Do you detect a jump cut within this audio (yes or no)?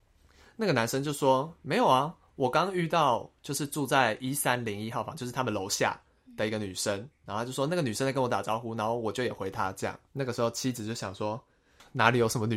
yes